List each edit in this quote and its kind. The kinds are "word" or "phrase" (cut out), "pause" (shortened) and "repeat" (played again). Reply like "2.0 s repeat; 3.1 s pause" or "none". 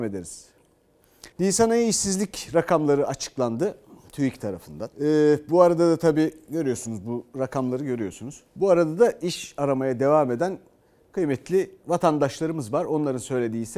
1.3 s pause; 4.9 s pause; 8.5 s pause